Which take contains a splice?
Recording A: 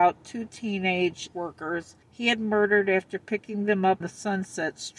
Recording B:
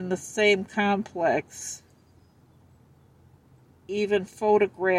A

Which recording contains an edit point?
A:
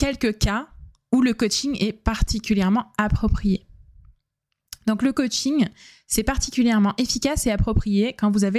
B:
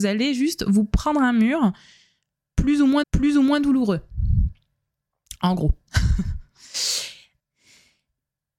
B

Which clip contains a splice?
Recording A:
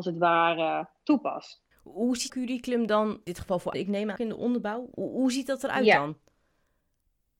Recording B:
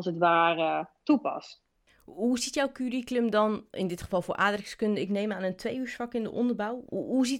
A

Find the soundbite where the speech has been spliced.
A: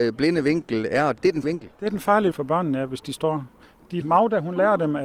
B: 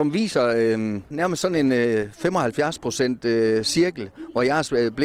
A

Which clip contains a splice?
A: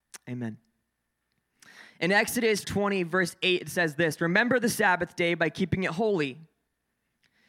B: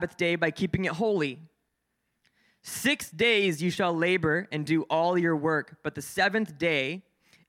A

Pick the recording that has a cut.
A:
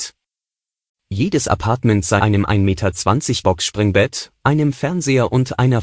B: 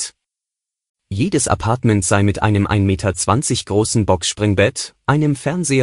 A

